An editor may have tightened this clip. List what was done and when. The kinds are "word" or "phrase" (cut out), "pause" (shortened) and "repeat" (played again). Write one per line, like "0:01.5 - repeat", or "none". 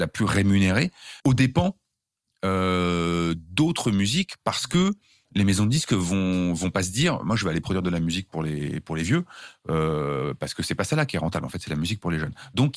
0:01.2 - pause